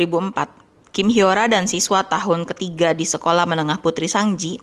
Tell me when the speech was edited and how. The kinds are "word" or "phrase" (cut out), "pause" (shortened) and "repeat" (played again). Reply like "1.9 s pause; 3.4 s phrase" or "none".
none